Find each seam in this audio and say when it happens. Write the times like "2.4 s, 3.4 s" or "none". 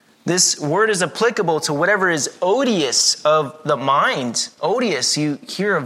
none